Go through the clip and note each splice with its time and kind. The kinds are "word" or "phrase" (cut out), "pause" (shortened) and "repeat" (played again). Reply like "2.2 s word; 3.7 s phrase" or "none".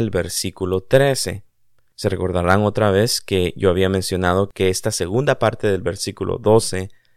none